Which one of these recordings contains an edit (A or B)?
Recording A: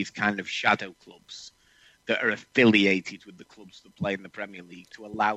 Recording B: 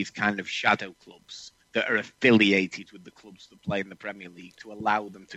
B